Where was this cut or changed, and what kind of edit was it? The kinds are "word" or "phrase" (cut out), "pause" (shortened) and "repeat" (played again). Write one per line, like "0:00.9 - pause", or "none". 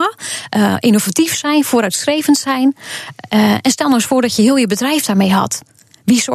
none